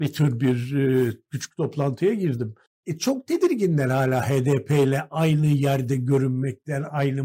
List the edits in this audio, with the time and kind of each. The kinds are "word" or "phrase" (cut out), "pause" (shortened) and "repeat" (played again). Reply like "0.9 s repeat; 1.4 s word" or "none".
2.7 s pause